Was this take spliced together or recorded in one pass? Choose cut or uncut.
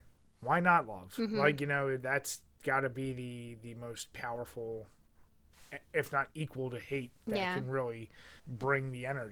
cut